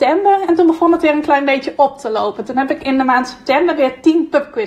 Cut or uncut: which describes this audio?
uncut